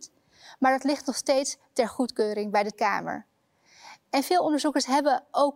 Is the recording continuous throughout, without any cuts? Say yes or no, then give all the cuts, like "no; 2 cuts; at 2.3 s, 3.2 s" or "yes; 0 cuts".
no; 1 cut; at 2.7 s